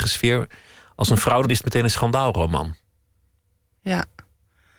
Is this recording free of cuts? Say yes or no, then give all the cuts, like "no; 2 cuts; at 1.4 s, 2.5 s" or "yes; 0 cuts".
no; 1 cut; at 1.4 s